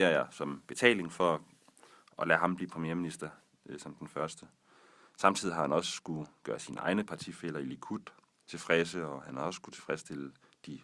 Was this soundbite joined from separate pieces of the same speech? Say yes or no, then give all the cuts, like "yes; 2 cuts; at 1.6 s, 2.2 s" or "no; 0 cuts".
no; 0 cuts